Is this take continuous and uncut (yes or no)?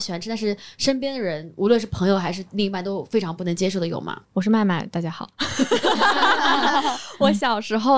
no